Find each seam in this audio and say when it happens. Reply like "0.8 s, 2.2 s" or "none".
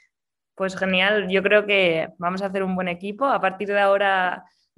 none